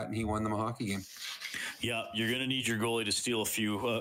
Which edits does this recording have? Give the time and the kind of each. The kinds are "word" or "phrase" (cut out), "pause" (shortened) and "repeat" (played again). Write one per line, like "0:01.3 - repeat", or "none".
none